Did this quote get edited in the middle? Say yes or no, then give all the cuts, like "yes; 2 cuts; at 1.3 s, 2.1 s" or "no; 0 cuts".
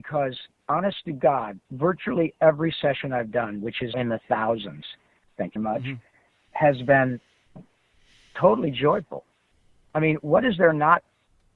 yes; 3 cuts; at 1.7 s, 3.9 s, 5.6 s